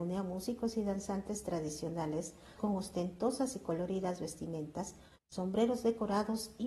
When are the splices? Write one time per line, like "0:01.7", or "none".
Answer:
0:02.6